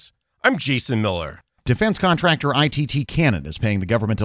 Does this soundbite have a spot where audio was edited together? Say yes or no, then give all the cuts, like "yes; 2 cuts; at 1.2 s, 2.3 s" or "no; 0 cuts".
no; 0 cuts